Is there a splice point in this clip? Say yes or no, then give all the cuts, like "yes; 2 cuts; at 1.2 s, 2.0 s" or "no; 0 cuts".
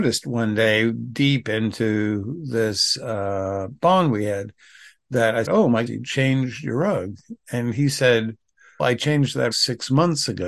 yes; 4 cuts; at 5.4 s, 5.9 s, 8.8 s, 9.5 s